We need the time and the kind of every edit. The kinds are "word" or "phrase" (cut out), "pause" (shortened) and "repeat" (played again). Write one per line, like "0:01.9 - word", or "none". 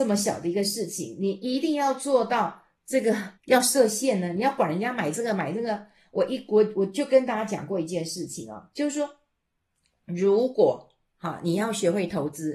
0:03.4 - pause

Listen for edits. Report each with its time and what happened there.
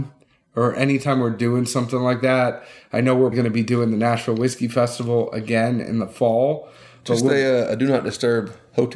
0:03.3 - word

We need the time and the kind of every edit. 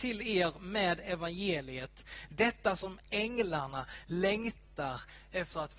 none

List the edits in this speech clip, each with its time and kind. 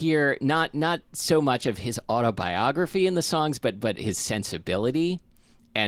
none

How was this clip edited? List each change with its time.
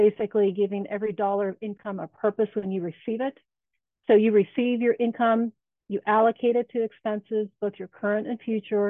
none

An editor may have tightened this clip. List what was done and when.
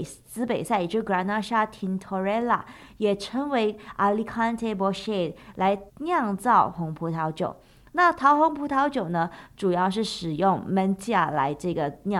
0:05.9 - pause

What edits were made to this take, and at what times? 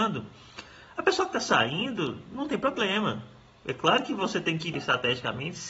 0:04.7 - word

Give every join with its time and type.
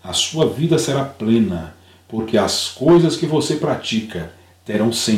none

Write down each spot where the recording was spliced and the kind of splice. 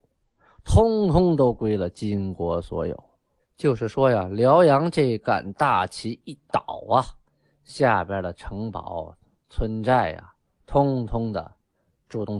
none

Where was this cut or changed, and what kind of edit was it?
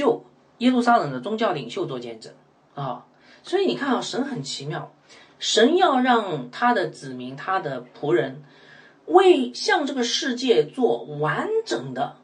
none

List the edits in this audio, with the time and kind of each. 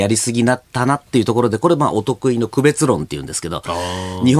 none

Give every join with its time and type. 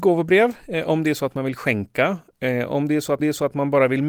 0:03.2 - repeat

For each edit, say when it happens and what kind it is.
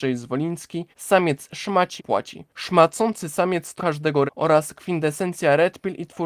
0:00.9 - pause
0:02.0 - word
0:02.5 - pause
0:03.8 - word
0:04.3 - word

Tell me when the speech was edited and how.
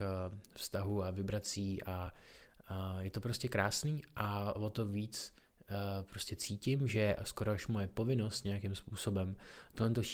none

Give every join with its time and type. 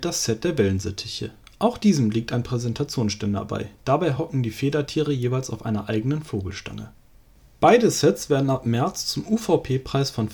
none

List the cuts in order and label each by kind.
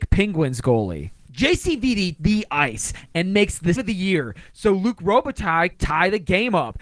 0:02.2 - word
0:03.7 - word
0:05.7 - word

